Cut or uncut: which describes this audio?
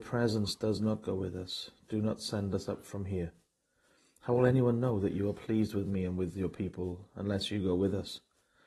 uncut